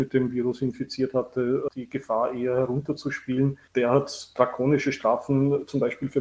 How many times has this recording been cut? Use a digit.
0